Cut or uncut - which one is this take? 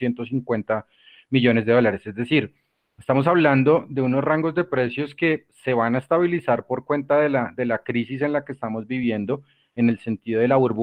uncut